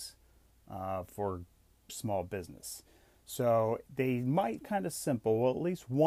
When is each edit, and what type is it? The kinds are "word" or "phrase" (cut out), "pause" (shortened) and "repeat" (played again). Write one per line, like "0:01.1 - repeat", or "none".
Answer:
0:01.9 - word
0:03.9 - word
0:04.6 - word